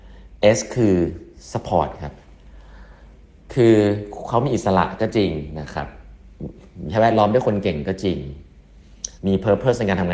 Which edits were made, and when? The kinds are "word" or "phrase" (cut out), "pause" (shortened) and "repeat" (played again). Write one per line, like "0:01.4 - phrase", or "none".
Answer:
0:09.2 - pause